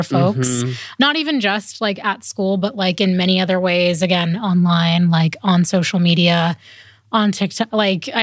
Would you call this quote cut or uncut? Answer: uncut